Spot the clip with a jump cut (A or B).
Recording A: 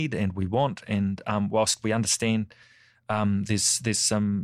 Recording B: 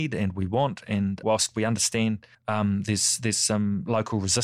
B